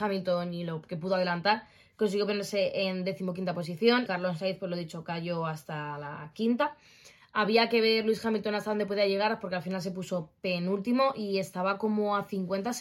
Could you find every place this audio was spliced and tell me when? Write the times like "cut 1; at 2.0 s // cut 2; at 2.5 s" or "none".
cut 1; at 4.1 s